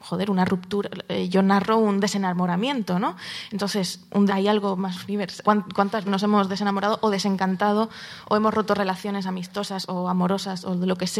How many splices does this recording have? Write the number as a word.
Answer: three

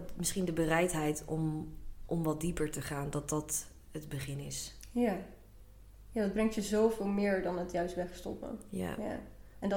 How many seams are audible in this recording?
zero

